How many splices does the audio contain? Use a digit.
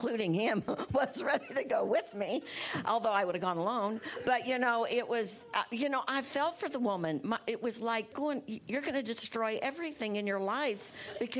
1